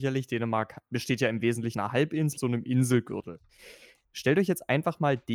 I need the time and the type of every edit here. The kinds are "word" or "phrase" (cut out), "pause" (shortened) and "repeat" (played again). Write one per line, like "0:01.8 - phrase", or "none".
0:01.7 - word
0:02.4 - word